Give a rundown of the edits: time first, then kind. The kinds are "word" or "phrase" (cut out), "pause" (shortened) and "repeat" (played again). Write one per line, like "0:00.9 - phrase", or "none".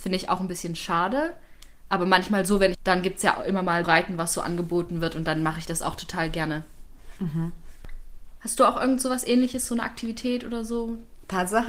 0:02.7 - phrase
0:03.8 - word